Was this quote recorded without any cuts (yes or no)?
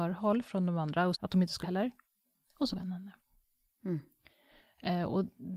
no